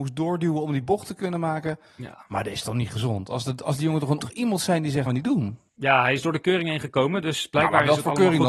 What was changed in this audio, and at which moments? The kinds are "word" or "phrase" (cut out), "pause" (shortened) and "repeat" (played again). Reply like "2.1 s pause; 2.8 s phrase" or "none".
4.2 s phrase; 5.1 s phrase; 5.7 s pause

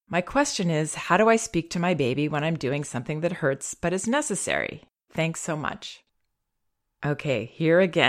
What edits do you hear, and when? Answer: none

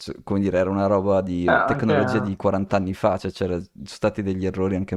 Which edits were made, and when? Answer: none

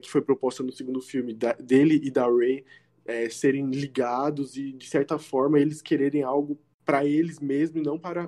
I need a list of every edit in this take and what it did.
none

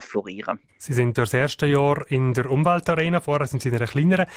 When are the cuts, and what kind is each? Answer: 1.2 s word

